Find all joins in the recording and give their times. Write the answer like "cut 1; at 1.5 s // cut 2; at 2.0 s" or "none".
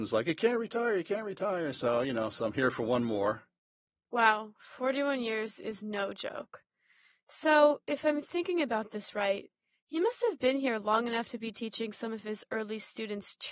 none